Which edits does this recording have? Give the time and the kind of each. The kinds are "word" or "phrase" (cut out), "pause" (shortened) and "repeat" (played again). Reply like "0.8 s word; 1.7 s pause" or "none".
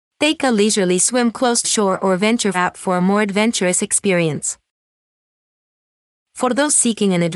1.6 s word; 2.5 s word